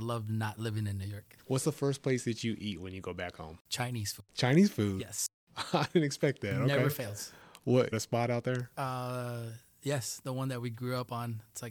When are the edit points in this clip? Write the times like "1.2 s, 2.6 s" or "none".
1.4 s, 3.7 s, 4.3 s, 5.3 s, 7.9 s